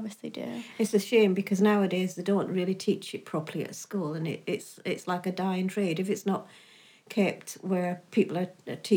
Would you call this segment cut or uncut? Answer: uncut